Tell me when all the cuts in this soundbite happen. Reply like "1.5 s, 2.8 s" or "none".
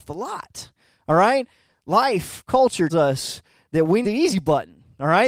2.9 s, 4.0 s